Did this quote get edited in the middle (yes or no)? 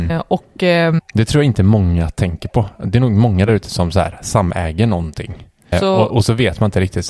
no